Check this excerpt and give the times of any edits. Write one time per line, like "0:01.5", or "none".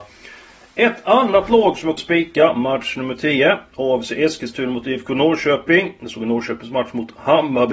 0:02.0